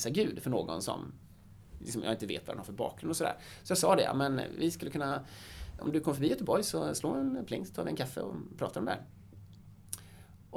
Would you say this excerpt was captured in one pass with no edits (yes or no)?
no